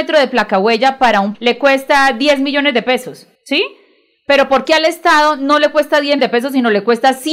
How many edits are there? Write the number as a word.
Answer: three